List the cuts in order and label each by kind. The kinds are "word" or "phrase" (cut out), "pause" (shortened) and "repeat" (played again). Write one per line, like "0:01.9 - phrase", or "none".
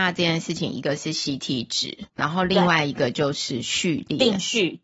0:02.1 - pause